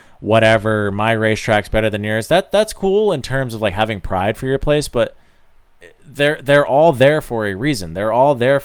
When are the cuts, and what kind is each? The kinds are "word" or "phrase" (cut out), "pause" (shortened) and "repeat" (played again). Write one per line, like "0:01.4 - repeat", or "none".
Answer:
none